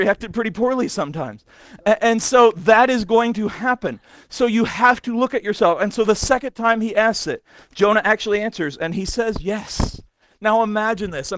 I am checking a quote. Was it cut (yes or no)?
no